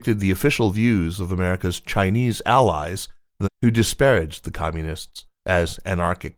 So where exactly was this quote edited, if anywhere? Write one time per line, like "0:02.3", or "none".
0:03.4